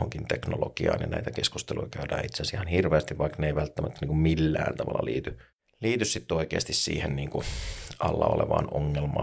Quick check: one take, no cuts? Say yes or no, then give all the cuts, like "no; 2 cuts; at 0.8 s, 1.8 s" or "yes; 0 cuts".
yes; 0 cuts